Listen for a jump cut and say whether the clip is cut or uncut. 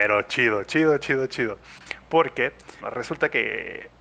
cut